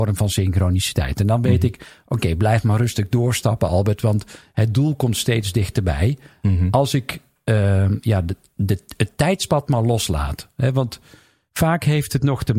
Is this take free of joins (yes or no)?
yes